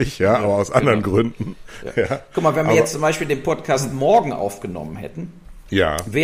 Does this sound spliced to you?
no; 0 cuts

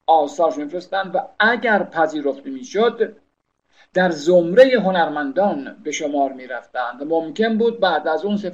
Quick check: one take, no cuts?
yes; 0 cuts

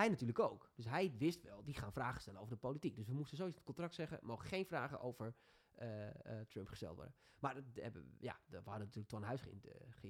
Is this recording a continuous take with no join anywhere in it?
yes; 0 cuts

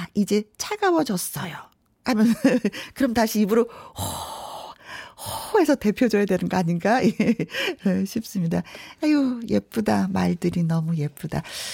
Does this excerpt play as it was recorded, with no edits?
yes; 0 cuts

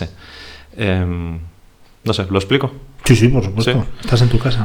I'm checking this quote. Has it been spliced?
no; 0 cuts

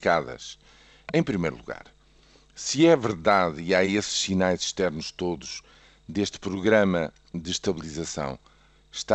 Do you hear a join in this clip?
no; 0 cuts

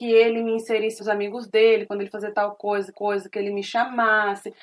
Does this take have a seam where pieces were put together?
yes; 3 cuts; at 1.0 s, 2.1 s, 2.9 s

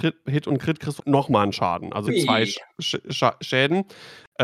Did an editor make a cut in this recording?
yes; 2 cuts; at 1.0 s, 2.1 s

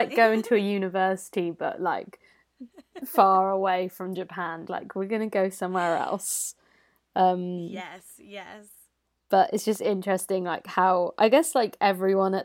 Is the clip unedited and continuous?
no; 1 cut; at 4.7 s

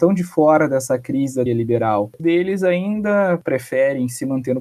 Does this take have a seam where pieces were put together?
yes; 2 cuts; at 1.5 s, 2.2 s

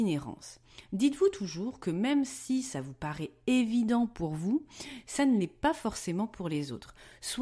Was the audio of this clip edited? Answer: no; 0 cuts

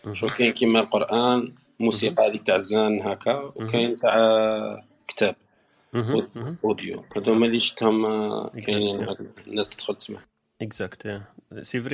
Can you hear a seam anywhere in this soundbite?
no; 0 cuts

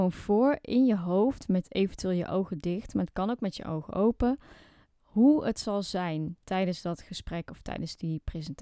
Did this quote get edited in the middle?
no; 0 cuts

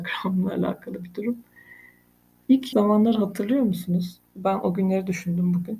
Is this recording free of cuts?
no; 2 cuts; at 2.7 s, 4.3 s

